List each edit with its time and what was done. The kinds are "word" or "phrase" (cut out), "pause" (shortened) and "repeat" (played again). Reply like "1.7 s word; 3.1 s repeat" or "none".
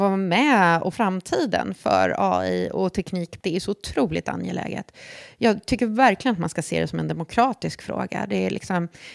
0.9 s word; 3.4 s word